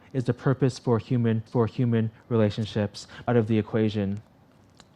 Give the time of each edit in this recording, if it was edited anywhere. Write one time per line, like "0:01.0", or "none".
0:01.5
0:03.3